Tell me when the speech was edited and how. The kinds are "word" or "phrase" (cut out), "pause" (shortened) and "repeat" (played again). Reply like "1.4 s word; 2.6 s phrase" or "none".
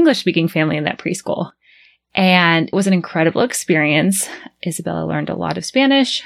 2.7 s word